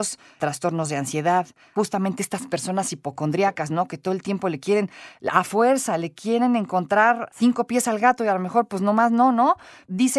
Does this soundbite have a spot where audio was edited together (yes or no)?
no